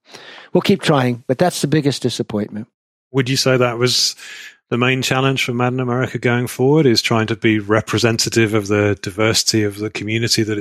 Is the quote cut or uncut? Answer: uncut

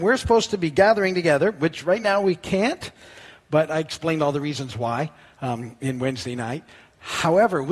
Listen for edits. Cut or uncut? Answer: uncut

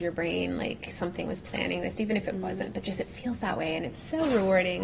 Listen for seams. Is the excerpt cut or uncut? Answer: uncut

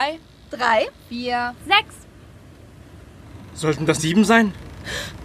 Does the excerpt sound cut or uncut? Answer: cut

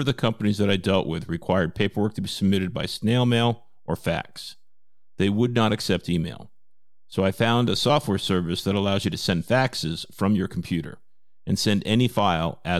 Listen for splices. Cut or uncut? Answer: uncut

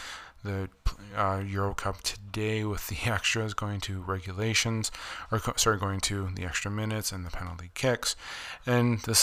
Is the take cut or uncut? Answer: uncut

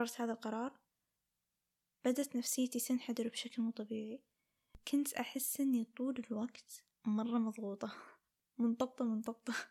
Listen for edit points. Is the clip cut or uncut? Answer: cut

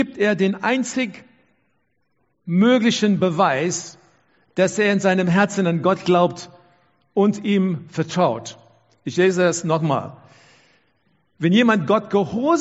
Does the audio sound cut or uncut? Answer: uncut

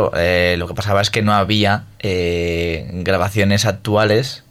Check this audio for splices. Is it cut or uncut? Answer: uncut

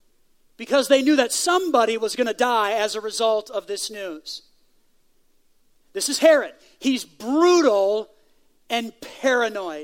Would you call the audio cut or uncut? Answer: uncut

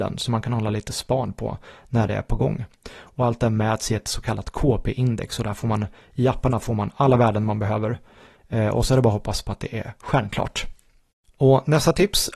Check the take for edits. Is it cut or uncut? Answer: uncut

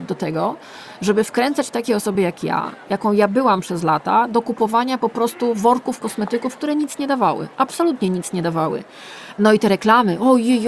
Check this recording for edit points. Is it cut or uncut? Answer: uncut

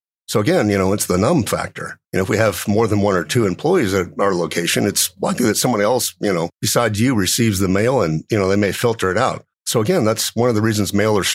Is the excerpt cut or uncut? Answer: cut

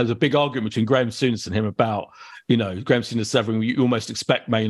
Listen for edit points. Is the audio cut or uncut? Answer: uncut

